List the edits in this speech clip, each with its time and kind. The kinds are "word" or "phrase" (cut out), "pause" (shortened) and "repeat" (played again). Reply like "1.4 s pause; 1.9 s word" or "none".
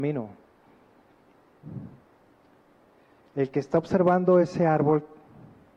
none